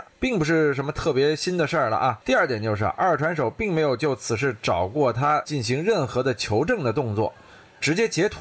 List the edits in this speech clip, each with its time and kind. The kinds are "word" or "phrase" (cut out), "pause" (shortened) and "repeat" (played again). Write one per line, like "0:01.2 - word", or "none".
0:02.2 - pause